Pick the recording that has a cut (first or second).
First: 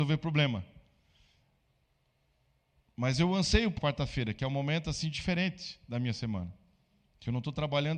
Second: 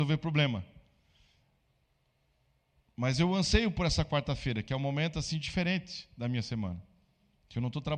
first